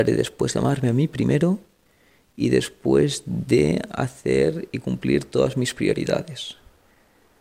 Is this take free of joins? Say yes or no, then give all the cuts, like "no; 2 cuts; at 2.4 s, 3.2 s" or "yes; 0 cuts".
yes; 0 cuts